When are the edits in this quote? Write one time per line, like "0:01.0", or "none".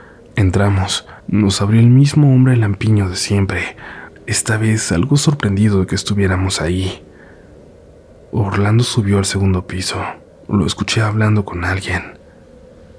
0:01.2
0:10.3